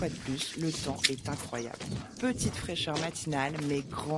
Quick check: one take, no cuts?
yes; 0 cuts

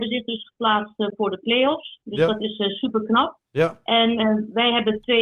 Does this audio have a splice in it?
no; 0 cuts

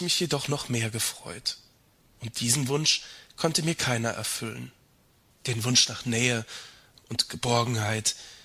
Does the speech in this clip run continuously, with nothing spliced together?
yes; 0 cuts

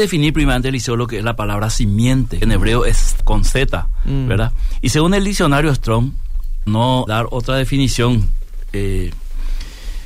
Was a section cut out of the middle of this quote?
yes; 4 cuts; at 2.4 s, 3.2 s, 6.7 s, 7.1 s

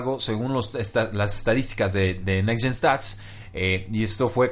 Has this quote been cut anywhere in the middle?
no; 0 cuts

